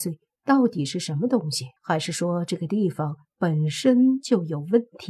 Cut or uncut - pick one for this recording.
cut